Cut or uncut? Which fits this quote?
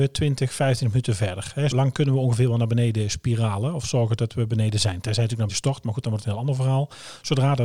cut